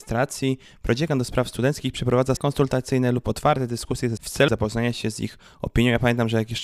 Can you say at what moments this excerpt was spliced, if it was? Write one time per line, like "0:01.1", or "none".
0:02.4
0:04.2
0:04.5